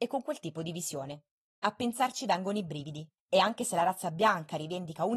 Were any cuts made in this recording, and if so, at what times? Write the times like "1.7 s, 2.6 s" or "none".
1.5 s, 3.2 s